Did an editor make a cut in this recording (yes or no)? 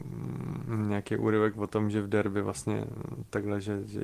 no